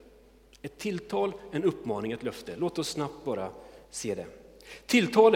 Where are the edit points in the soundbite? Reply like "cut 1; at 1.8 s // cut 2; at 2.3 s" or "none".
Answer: cut 1; at 3.8 s